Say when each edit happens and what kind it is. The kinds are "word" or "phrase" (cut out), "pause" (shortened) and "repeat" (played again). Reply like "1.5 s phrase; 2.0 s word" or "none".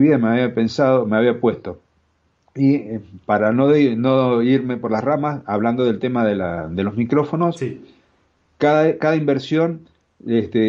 none